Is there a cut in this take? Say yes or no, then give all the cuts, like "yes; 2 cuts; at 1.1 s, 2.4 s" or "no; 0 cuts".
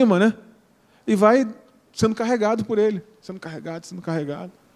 no; 0 cuts